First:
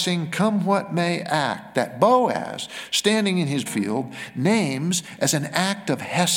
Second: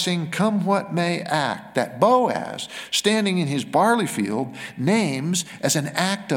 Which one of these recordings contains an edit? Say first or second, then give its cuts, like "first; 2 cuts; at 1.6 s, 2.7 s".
first; 1 cut; at 3.7 s